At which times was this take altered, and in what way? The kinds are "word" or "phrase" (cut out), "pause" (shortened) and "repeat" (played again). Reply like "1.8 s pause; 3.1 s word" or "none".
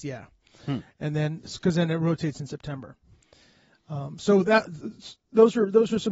none